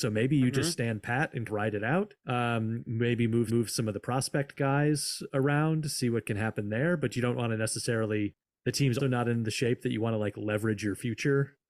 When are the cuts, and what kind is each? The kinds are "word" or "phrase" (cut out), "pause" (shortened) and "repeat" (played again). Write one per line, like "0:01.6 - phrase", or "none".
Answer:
0:01.5 - word
0:02.2 - pause
0:03.5 - repeat
0:08.4 - pause
0:09.0 - word